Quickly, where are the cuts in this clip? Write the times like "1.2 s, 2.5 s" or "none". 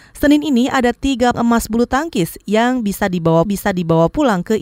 1.3 s, 3.5 s